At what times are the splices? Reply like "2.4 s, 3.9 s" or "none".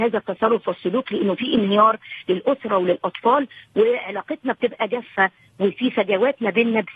none

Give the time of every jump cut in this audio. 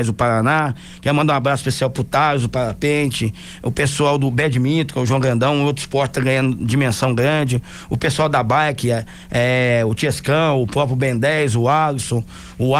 none

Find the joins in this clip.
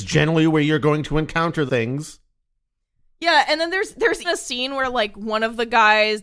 1.7 s, 4.2 s

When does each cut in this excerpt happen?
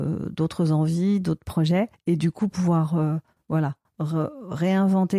1.9 s

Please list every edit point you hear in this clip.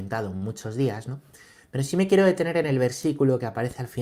none

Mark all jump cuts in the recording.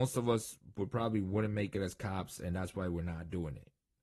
none

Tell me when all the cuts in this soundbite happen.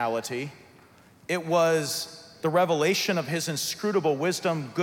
none

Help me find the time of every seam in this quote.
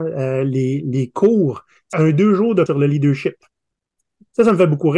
1.9 s, 2.7 s

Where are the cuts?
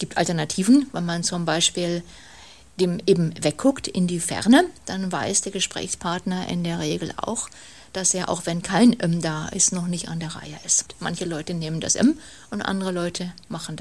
none

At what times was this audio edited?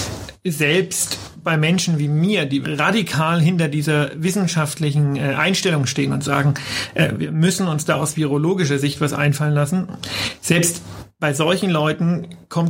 2.6 s

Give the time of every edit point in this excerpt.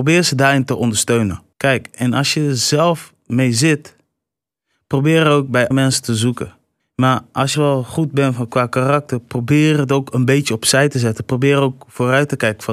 1.5 s, 5.7 s, 6.8 s, 7.5 s

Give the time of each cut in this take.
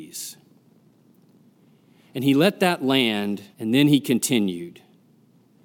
3.5 s

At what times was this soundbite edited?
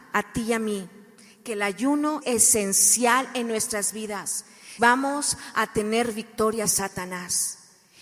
2.2 s, 4.8 s, 6.6 s

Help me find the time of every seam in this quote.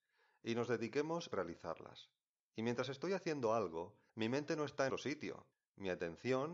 1.3 s, 4.1 s, 4.9 s, 5.5 s

